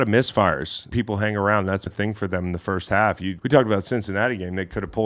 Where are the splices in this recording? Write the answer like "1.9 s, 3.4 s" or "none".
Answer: 0.9 s, 1.9 s, 3.4 s